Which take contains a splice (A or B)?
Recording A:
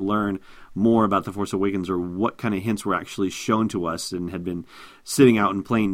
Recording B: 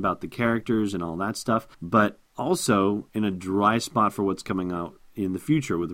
B